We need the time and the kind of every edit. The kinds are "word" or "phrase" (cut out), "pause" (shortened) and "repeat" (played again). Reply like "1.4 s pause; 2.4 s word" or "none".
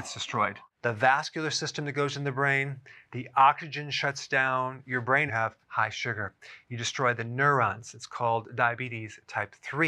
5.3 s phrase; 5.6 s pause